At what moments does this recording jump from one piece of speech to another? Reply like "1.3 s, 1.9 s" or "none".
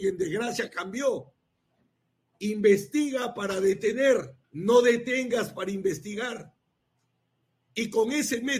4.4 s